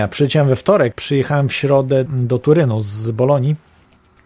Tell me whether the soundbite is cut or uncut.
cut